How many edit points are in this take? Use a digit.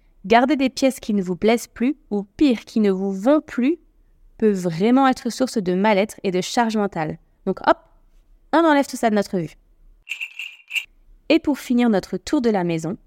0